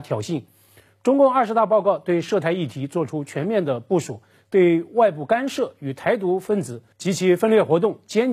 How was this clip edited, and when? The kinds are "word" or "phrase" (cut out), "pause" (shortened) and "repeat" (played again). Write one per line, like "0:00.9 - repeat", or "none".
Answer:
0:06.9 - pause